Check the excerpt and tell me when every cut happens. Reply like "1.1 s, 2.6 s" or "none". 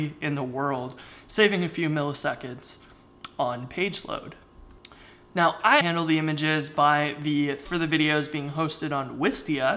5.8 s, 7.7 s